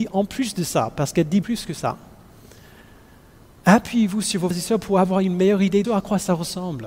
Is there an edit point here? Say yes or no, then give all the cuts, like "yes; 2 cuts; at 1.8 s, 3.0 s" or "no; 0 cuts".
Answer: yes; 3 cuts; at 1.4 s, 4.5 s, 5.8 s